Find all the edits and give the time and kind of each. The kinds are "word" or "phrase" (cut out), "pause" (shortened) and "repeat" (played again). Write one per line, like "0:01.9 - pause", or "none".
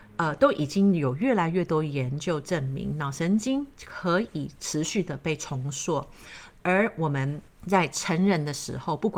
0:07.5 - pause